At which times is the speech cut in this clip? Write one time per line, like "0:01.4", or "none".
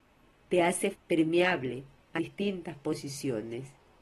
0:00.9
0:02.2